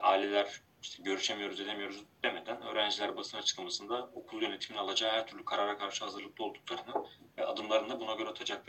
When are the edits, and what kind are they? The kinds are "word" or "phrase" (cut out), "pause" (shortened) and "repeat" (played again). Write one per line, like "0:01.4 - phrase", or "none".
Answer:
none